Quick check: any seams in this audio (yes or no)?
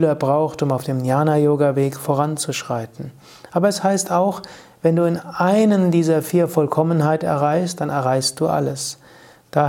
no